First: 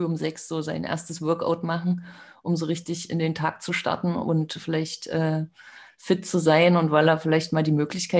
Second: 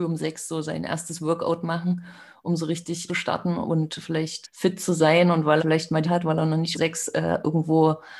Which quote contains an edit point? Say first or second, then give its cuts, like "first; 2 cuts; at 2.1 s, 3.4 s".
second; 5 cuts; at 3.1 s, 4.4 s, 5.6 s, 6.0 s, 6.7 s